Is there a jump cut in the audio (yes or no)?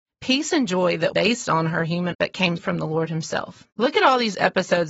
yes